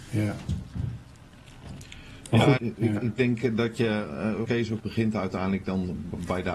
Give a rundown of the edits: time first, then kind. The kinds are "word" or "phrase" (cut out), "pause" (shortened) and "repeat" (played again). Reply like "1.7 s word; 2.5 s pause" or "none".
2.6 s word; 4.4 s word; 4.8 s word